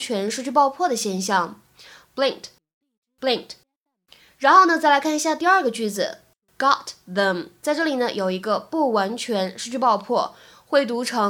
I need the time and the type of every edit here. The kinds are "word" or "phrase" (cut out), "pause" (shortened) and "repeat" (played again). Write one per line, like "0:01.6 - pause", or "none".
none